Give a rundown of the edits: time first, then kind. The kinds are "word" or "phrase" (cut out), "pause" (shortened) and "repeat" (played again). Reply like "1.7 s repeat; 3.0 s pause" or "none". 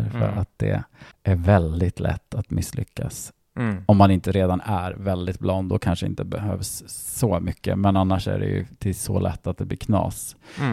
1.1 s pause